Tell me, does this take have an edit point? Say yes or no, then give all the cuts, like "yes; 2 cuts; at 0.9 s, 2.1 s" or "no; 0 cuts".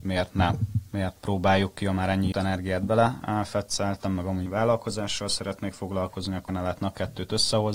yes; 4 cuts; at 1.2 s, 2.3 s, 4.5 s, 6.5 s